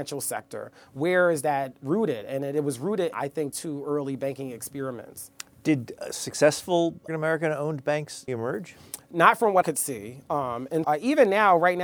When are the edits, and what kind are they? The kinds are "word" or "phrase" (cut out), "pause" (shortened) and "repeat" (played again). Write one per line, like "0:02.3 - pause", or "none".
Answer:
0:03.1 - word
0:03.5 - word
0:07.1 - word
0:08.3 - word
0:09.6 - word
0:10.8 - word

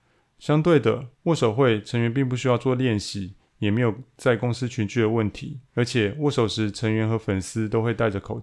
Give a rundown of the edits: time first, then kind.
0:01.1 - pause
0:05.6 - pause

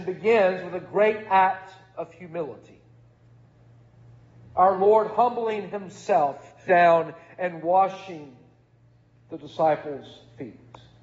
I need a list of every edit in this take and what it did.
0:06.7 - word

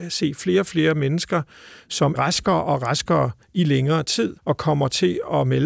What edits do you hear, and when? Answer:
0:02.2 - word
0:03.4 - pause
0:04.4 - pause

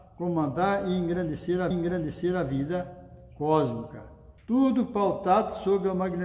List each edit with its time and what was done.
0:01.7 - repeat
0:04.4 - pause

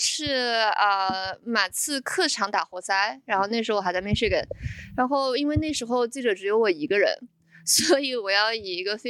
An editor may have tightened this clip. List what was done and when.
none

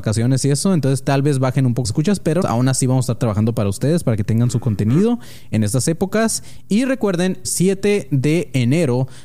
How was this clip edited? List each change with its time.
0:01.8 - word
0:02.4 - word
0:07.4 - word

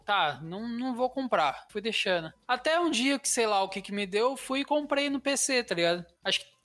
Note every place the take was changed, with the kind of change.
none

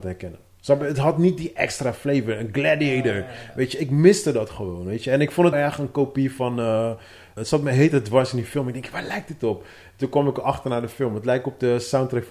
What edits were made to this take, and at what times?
0:05.5 - word
0:07.4 - word

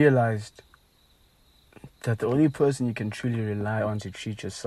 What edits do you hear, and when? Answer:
none

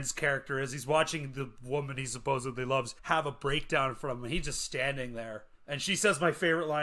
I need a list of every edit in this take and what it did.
0:03.0 - pause
0:05.5 - pause

